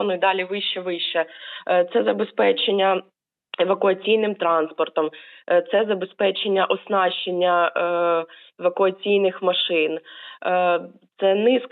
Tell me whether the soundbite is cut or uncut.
uncut